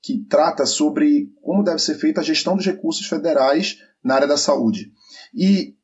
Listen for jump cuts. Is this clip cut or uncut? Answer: uncut